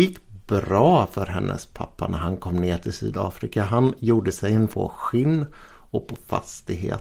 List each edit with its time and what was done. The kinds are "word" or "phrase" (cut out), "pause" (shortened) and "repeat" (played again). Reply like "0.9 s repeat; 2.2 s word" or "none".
4.7 s word